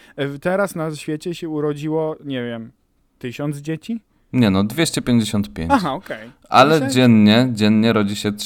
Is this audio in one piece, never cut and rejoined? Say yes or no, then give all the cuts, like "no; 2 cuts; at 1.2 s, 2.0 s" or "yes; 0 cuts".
yes; 0 cuts